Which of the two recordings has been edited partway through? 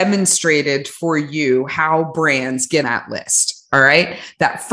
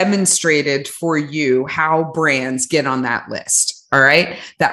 first; 1 cut; at 2.8 s

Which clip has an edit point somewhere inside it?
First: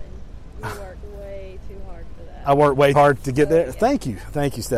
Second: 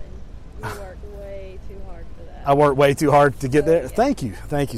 first; 1 cut; at 2.9 s

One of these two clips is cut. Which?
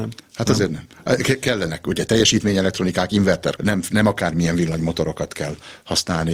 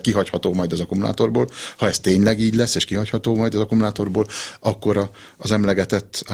first; 2 cuts; at 3.6 s, 3.9 s

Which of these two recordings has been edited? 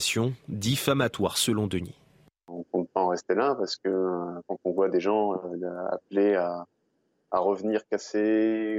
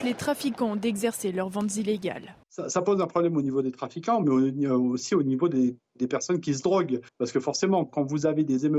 second; 3 cuts; at 2.4 s, 7.1 s, 7.9 s

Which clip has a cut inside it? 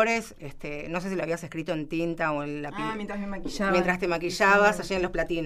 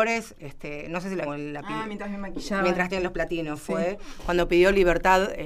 second; 2 cuts; at 1.2 s, 2.9 s

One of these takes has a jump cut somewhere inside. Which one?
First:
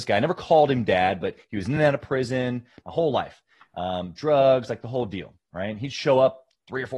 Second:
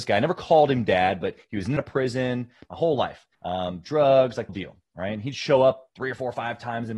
second; 4 cuts; at 1.8 s, 3.3 s, 4.5 s, 5.9 s

